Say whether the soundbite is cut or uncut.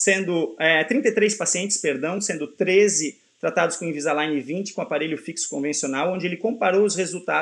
uncut